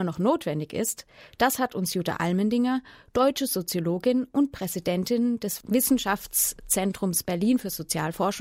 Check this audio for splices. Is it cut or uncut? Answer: uncut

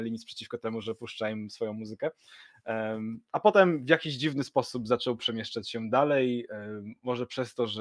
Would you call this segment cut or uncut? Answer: uncut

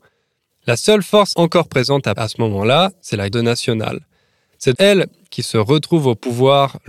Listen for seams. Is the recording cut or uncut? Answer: cut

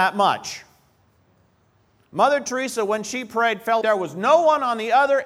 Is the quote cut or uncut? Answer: cut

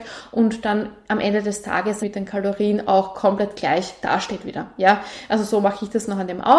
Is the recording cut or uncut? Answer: cut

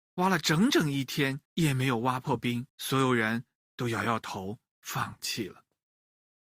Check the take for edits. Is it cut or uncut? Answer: cut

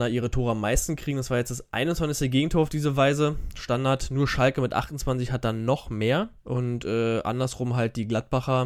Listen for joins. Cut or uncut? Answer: cut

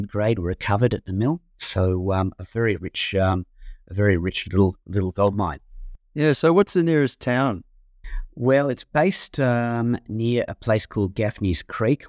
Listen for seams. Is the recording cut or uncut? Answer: uncut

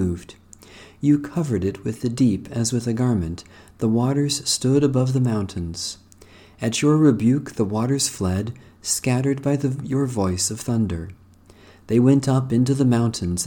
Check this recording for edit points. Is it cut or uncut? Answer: uncut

